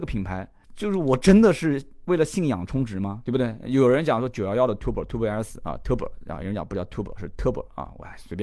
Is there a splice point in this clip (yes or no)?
no